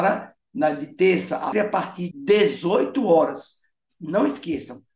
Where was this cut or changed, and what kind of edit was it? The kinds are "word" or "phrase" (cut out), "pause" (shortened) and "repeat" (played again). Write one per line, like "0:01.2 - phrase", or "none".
0:01.5 - phrase
0:02.1 - word